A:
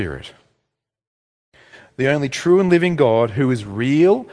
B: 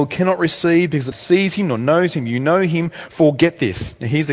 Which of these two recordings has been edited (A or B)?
B